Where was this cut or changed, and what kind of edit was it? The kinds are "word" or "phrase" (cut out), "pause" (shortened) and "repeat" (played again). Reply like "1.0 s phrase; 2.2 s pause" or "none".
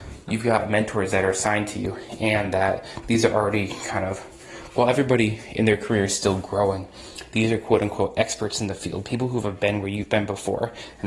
none